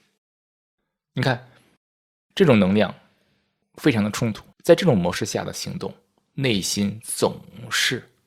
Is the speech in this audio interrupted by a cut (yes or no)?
yes